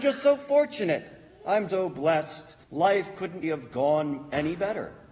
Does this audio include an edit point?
yes; 3 cuts; at 1.7 s, 2.6 s, 3.4 s

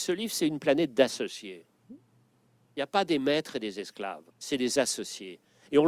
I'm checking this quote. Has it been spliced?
yes; 1 cut; at 4.3 s

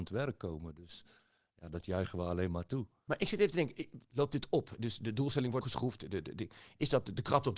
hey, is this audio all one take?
no; 2 cuts; at 4.0 s, 5.6 s

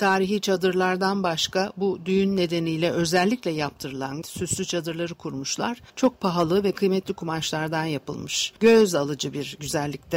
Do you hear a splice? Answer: yes; 3 cuts; at 4.2 s, 5.9 s, 8.6 s

